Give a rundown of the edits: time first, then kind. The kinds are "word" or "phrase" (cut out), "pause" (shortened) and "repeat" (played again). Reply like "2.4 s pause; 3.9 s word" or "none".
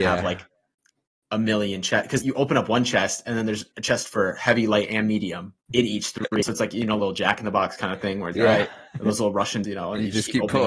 2.2 s word; 3.7 s pause; 5.6 s pause; 8.3 s word; 8.9 s pause; 9.6 s word